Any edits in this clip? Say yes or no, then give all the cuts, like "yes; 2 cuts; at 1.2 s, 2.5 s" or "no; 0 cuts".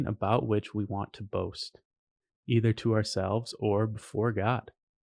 no; 0 cuts